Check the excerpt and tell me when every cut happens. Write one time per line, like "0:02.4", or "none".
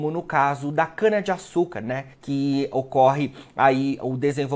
0:02.1